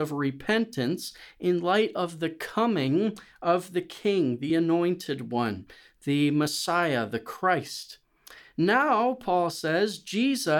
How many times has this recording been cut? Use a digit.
0